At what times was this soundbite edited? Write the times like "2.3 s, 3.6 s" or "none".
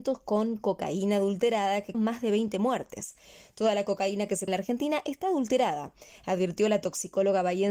1.9 s, 4.5 s